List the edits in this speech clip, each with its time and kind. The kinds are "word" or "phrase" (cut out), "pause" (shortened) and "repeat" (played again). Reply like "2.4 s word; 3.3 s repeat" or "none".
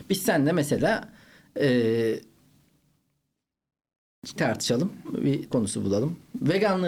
4.4 s word; 5.5 s word